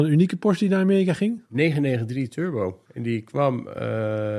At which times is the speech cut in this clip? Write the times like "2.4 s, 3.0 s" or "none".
1.5 s, 2.9 s